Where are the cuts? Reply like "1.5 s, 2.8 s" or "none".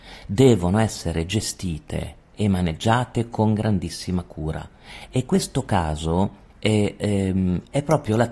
6.5 s